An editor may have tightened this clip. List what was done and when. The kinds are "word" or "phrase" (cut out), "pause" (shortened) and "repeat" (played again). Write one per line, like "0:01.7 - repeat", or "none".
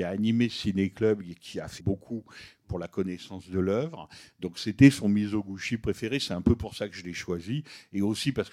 0:01.8 - word